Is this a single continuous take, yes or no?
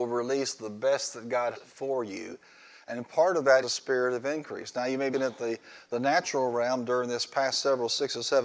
no